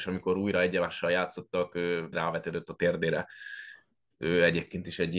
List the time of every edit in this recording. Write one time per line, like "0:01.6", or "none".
0:02.1